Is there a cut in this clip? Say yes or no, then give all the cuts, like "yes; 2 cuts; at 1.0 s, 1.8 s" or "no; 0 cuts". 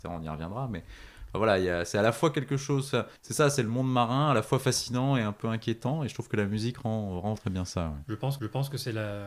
yes; 3 cuts; at 3.2 s, 7.4 s, 8.4 s